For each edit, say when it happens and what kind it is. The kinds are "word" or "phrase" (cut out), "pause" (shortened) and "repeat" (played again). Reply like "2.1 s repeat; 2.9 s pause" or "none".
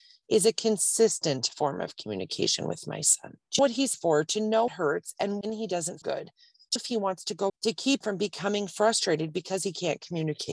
3.6 s word; 3.9 s word; 4.7 s word; 5.4 s word; 6.0 s word; 6.8 s word; 7.5 s word; 8.0 s word